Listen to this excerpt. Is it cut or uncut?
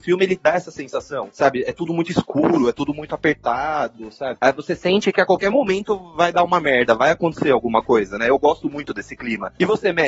uncut